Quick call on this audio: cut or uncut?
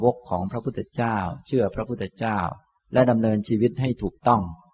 uncut